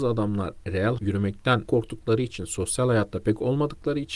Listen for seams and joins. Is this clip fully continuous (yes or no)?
no